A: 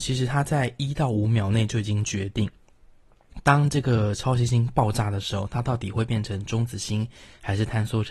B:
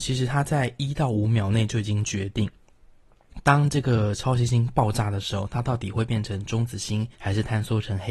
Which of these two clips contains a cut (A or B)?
B